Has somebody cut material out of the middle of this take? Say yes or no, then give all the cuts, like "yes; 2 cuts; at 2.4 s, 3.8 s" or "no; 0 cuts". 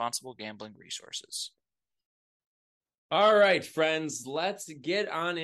no; 0 cuts